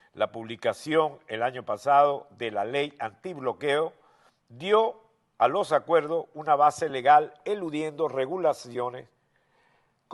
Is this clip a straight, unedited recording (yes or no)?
yes